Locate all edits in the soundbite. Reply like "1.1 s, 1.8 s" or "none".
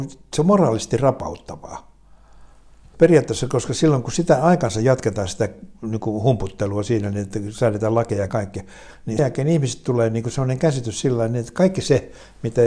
2.9 s, 8.3 s, 9.2 s